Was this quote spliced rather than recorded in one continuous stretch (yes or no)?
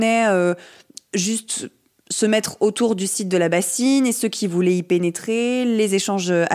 no